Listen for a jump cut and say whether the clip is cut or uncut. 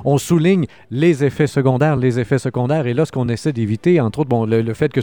uncut